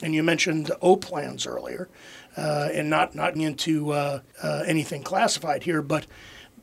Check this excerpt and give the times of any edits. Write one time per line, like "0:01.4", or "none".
0:03.4
0:04.3